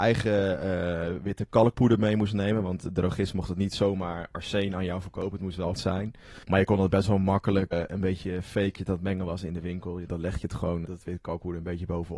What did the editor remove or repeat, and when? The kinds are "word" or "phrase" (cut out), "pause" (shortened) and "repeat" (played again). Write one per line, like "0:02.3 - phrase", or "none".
0:05.8 - word
0:06.4 - pause
0:07.7 - word
0:08.7 - word
0:10.1 - word
0:10.9 - word